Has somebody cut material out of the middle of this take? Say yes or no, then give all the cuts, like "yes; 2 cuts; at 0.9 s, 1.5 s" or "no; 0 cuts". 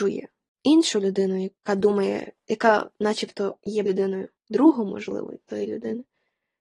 yes; 3 cuts; at 1.6 s, 3.9 s, 4.4 s